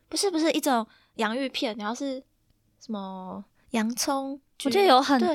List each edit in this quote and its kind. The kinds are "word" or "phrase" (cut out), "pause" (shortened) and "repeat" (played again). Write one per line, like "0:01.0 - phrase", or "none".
none